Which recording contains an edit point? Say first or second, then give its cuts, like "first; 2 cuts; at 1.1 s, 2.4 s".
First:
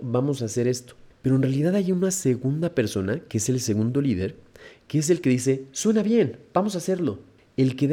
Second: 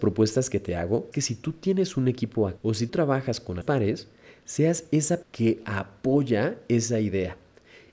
second; 5 cuts; at 1.1 s, 2.6 s, 2.9 s, 3.6 s, 5.2 s